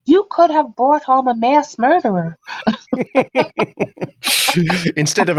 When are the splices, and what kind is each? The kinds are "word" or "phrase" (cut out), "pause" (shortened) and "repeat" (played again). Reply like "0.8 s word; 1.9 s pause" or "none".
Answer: none